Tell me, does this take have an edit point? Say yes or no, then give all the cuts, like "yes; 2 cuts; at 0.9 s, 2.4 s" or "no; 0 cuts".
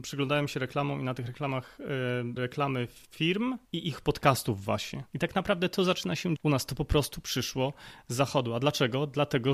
yes; 4 cuts; at 2.4 s, 3.7 s, 5.1 s, 6.4 s